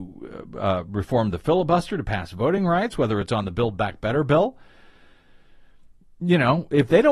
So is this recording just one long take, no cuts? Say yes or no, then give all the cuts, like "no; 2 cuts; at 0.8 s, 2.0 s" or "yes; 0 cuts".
yes; 0 cuts